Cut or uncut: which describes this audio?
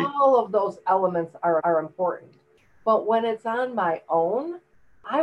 cut